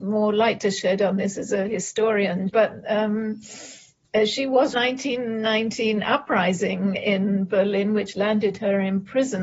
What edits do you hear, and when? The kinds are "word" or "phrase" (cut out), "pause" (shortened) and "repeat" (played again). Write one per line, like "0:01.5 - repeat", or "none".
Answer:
0:02.5 - word
0:04.7 - phrase